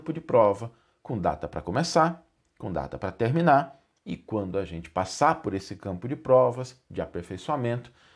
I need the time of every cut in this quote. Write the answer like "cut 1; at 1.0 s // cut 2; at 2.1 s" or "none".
none